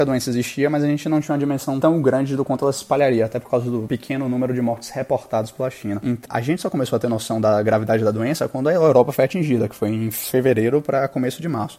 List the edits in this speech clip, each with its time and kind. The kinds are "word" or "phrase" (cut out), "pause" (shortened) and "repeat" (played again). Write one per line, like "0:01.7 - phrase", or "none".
0:06.3 - word